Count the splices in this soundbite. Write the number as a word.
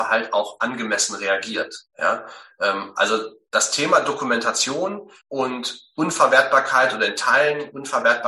two